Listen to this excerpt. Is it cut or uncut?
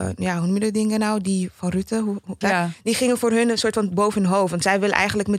cut